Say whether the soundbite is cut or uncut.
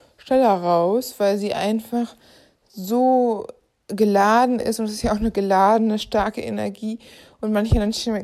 uncut